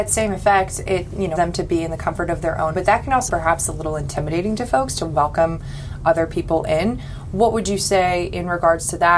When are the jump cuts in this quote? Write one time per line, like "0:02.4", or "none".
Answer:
0:01.4
0:02.7
0:03.3